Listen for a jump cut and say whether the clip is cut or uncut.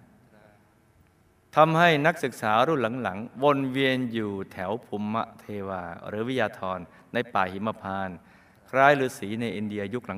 uncut